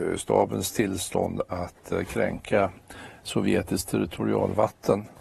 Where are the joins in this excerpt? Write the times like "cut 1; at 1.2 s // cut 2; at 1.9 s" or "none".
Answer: none